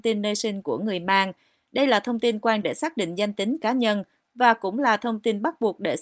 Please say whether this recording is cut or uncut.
cut